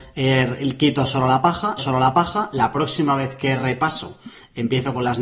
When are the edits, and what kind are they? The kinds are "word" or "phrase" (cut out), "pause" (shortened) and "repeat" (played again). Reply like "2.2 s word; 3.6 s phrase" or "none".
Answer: 1.8 s repeat